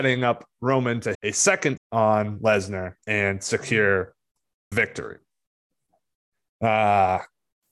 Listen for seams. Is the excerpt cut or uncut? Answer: cut